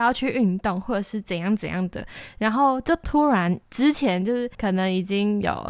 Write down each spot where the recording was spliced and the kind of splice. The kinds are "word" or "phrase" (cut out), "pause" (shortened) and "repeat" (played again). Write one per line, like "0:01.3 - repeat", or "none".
0:03.6 - pause
0:04.5 - pause